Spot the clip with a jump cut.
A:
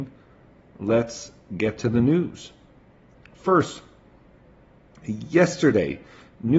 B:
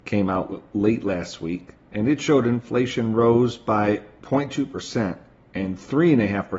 B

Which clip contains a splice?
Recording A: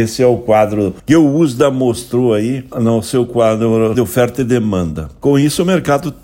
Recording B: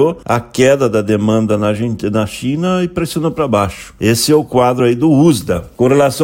A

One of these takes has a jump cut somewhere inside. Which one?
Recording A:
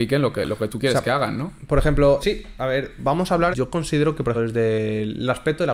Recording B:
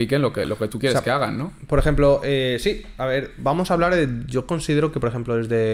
A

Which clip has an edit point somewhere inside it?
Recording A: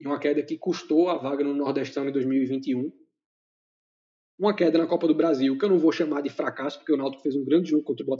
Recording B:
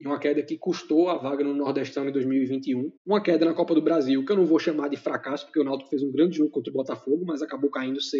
B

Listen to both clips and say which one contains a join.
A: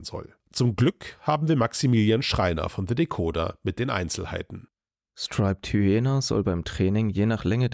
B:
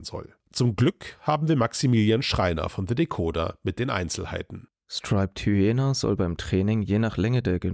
B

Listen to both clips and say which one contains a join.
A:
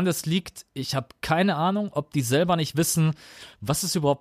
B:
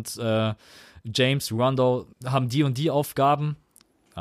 B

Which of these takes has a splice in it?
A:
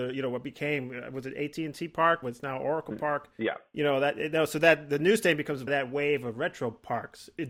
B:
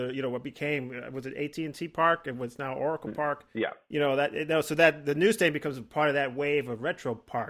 A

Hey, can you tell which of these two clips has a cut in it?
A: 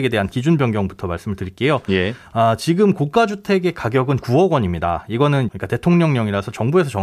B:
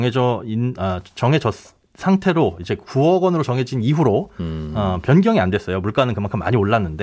A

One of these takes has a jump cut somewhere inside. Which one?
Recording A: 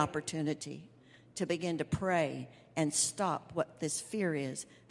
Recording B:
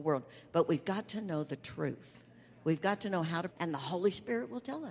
B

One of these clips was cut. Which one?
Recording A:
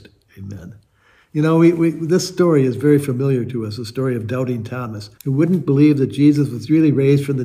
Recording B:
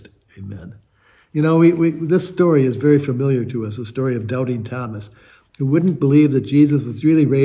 A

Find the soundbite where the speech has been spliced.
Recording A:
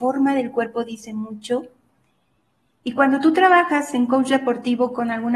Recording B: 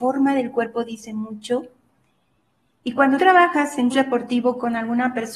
B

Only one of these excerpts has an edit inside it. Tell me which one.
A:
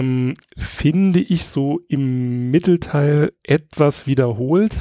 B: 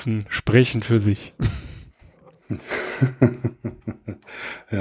A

